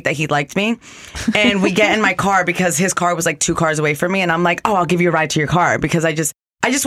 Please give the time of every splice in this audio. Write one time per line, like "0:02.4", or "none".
none